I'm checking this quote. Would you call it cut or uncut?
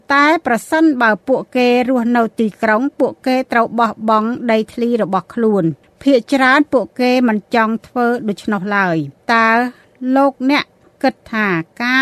cut